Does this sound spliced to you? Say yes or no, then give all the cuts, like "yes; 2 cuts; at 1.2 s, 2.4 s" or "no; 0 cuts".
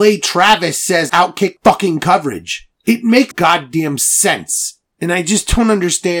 yes; 4 cuts; at 1.1 s, 1.6 s, 2.7 s, 3.3 s